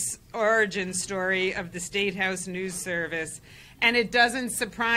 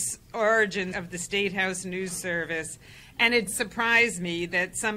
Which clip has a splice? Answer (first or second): second